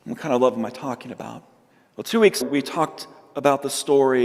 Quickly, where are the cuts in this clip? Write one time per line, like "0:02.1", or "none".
0:01.7
0:02.4